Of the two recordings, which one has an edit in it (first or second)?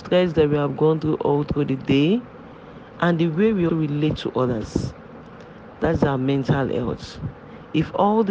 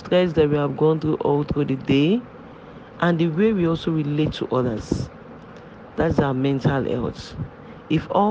first